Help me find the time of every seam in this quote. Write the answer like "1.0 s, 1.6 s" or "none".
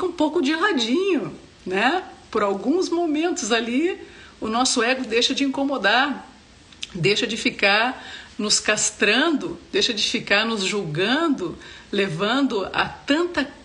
none